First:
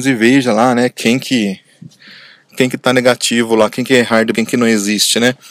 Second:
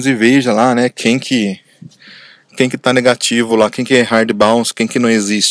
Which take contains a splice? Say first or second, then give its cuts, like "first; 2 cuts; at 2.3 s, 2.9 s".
first; 1 cut; at 4.3 s